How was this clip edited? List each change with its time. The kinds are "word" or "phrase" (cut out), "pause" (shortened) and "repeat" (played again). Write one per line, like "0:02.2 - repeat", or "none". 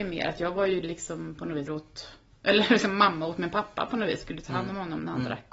0:01.7 - word